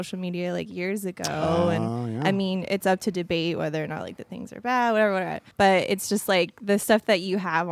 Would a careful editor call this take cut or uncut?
cut